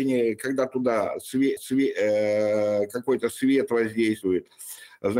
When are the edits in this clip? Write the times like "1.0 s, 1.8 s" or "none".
1.6 s